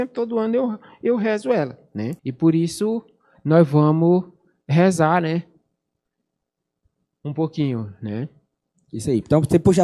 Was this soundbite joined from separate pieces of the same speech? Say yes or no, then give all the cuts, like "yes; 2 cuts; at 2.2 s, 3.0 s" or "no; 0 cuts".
yes; 1 cut; at 2.2 s